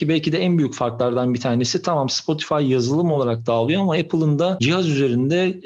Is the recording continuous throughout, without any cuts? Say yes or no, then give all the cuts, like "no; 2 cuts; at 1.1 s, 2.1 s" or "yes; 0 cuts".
yes; 0 cuts